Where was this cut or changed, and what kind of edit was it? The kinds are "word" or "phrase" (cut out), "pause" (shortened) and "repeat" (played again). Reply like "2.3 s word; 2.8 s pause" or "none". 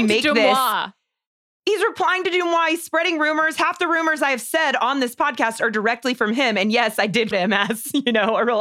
7.3 s word